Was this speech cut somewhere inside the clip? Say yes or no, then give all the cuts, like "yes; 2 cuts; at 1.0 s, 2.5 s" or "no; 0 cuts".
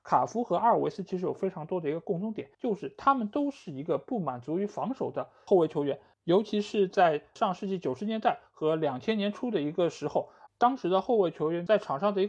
yes; 1 cut; at 2.5 s